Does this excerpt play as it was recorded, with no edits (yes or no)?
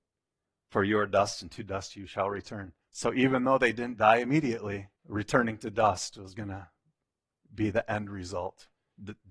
no